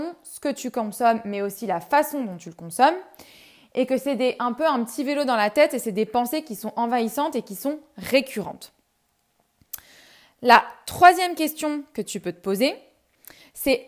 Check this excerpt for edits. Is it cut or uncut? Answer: uncut